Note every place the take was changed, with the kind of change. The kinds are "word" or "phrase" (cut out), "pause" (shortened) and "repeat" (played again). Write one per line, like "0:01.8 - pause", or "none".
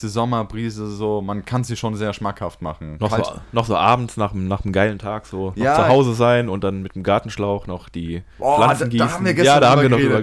none